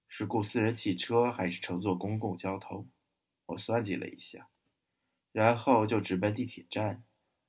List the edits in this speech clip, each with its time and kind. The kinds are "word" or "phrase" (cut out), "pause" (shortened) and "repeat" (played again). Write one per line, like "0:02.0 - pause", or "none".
none